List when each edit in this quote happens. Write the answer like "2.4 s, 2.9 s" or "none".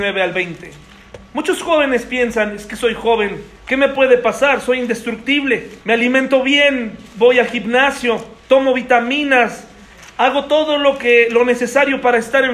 3.6 s, 5.8 s, 8.4 s